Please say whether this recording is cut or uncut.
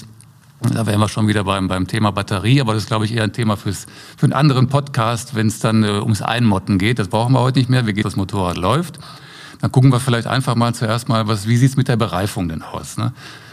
cut